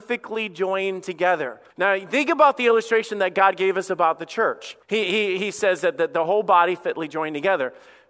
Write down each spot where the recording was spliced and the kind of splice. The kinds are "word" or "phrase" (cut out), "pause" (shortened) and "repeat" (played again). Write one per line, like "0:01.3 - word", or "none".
0:01.7 - pause
0:04.8 - pause